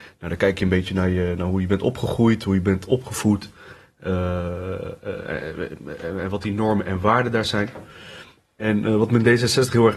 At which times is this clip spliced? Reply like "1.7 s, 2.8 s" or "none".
none